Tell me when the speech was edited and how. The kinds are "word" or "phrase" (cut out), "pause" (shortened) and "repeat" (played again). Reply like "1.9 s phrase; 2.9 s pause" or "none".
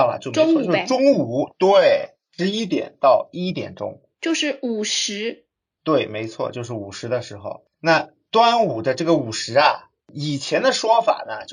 none